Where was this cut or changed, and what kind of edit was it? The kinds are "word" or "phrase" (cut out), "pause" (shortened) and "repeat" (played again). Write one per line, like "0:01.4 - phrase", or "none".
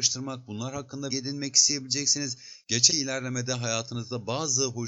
0:01.1 - word
0:02.9 - word